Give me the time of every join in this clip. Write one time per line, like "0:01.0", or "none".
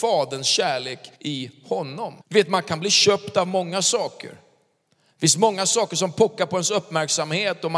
0:01.2
0:02.2